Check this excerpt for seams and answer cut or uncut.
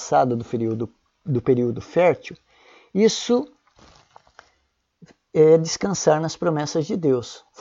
uncut